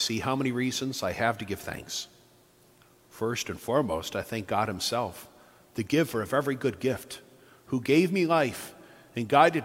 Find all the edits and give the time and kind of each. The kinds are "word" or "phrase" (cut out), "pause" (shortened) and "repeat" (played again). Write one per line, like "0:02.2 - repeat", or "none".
none